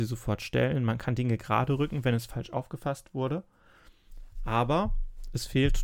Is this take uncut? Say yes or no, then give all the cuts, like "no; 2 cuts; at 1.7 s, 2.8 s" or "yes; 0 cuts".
yes; 0 cuts